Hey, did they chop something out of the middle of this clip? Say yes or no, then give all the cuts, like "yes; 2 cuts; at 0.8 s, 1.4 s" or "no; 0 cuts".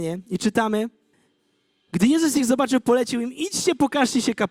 yes; 1 cut; at 1.1 s